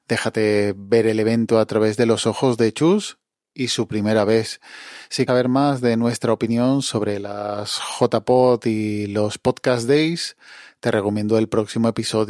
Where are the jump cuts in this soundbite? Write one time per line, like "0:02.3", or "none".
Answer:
0:05.3